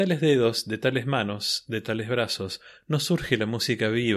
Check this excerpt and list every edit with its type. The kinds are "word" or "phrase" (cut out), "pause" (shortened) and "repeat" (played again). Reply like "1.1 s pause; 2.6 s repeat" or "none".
none

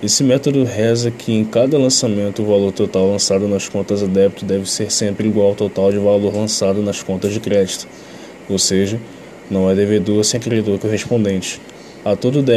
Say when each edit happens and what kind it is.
none

